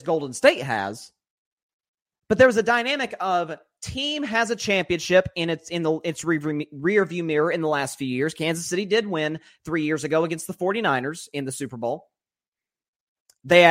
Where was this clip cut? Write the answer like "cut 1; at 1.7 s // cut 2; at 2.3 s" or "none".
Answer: none